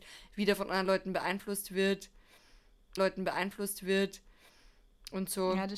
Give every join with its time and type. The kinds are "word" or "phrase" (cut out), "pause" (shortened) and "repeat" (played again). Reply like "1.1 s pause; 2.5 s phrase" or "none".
3.0 s repeat